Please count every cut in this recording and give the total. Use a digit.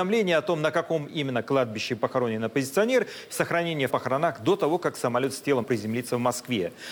3